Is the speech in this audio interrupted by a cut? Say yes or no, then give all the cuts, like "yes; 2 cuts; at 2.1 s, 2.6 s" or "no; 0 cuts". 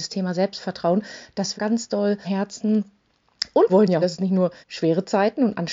yes; 5 cuts; at 1.6 s, 2.2 s, 3.7 s, 4.0 s, 4.6 s